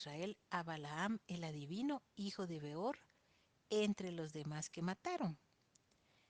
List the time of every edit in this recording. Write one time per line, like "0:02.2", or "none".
none